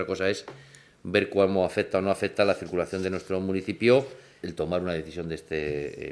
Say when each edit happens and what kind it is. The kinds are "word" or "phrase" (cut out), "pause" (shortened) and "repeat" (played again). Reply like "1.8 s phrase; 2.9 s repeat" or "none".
4.4 s word